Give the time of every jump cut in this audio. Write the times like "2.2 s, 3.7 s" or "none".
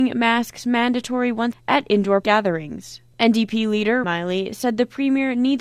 1.5 s, 2.2 s, 4.0 s